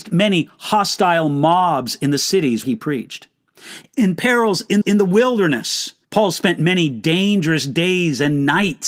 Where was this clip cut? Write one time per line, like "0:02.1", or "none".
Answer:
0:02.6
0:04.8
0:06.0